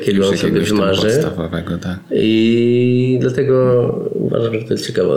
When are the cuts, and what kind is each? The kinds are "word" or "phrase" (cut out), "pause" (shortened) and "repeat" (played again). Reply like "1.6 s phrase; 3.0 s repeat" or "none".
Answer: none